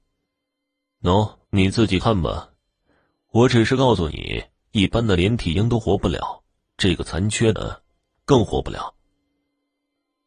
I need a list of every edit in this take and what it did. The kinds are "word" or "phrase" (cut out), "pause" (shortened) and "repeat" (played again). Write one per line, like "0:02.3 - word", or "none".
0:01.4 - pause